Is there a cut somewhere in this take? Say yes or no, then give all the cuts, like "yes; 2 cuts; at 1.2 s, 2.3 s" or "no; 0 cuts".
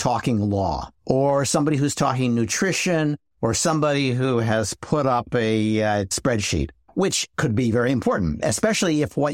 yes; 1 cut; at 1.0 s